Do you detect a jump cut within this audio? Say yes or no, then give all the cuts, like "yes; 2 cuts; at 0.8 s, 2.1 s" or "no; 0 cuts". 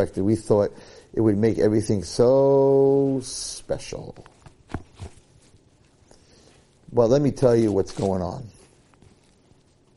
no; 0 cuts